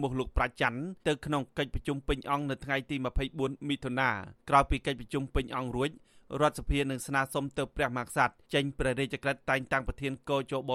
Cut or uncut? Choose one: cut